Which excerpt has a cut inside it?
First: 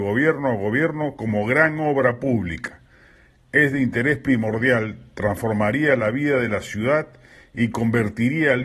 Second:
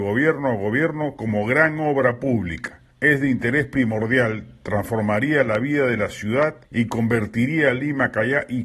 second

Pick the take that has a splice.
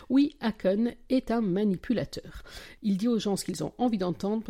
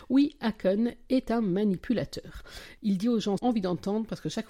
second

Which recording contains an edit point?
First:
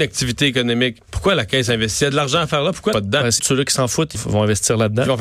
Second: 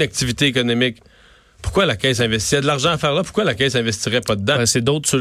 first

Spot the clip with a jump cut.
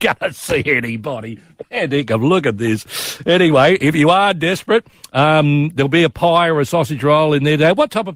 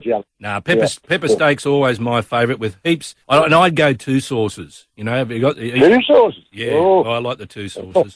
second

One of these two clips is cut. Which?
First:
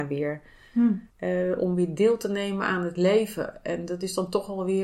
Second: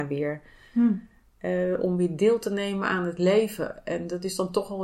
first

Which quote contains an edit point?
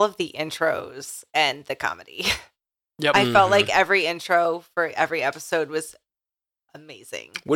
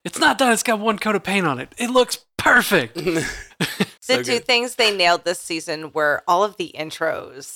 second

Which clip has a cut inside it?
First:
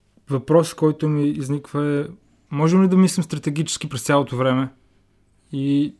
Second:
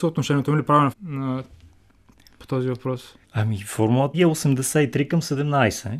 second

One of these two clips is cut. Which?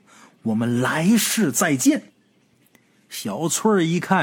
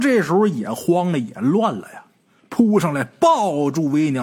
first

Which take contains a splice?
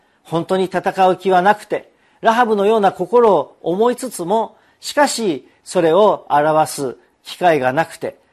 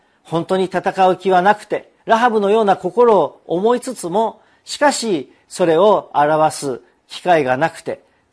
second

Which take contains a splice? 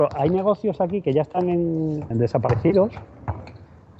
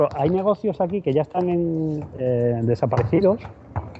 first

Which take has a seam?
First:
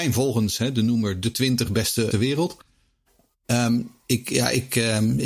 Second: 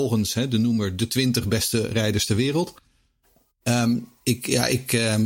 first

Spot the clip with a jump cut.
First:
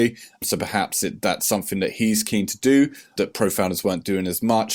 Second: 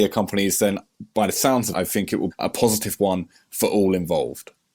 second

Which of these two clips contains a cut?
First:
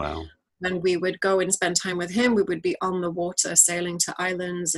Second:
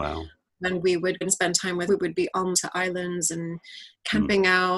second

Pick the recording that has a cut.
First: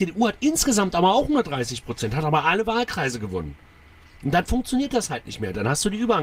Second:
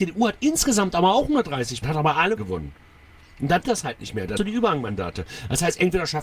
second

